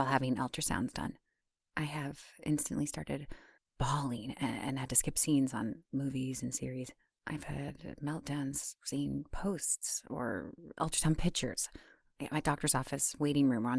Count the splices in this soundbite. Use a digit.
4